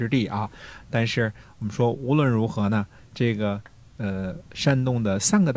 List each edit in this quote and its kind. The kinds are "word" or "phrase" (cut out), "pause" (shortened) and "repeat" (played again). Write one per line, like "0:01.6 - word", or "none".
none